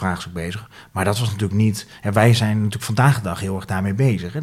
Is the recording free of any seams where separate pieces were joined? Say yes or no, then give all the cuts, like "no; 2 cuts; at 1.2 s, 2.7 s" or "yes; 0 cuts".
yes; 0 cuts